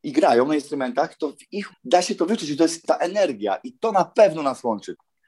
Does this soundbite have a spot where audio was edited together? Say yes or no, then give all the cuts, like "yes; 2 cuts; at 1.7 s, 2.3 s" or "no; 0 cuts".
yes; 2 cuts; at 1.7 s, 2.8 s